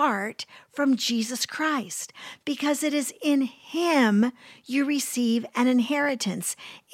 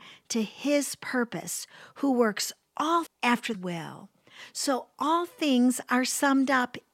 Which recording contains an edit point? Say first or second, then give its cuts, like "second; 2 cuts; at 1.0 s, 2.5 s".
second; 2 cuts; at 3.1 s, 3.5 s